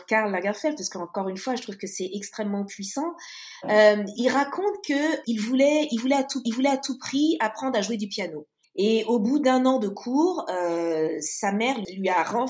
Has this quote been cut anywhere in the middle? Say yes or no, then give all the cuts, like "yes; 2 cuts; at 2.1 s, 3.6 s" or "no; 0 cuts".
yes; 4 cuts; at 4.2 s, 5.2 s, 6.4 s, 8.6 s